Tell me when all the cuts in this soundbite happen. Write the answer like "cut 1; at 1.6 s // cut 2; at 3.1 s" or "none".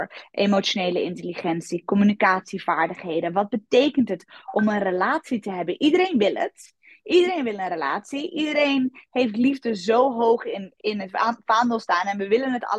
cut 1; at 10.8 s